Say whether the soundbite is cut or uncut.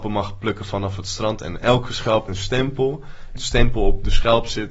cut